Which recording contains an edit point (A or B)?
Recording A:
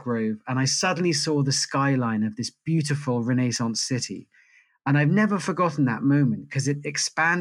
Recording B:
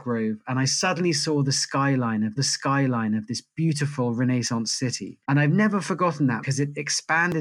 B